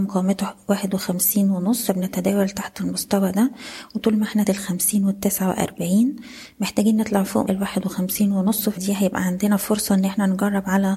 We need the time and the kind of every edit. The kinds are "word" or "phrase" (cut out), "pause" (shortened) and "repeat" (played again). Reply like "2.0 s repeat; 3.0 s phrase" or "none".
1.9 s word; 4.4 s phrase; 7.5 s word; 8.8 s word